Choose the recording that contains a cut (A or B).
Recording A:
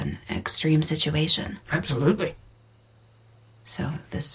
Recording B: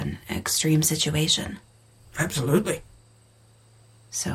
A